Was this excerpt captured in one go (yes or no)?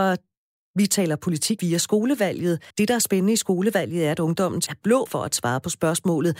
no